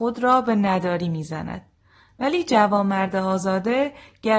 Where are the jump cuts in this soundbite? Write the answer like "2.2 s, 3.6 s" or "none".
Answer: none